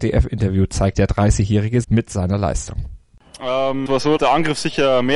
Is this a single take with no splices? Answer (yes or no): no